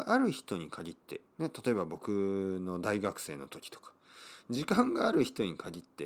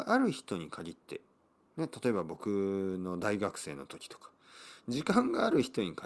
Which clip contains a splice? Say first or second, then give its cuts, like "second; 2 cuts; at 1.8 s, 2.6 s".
first; 1 cut; at 1.3 s